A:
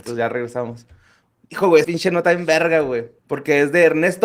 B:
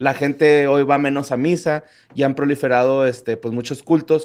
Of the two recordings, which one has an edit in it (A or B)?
A